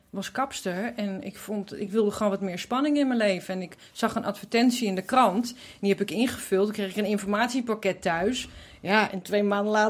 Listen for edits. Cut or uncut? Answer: uncut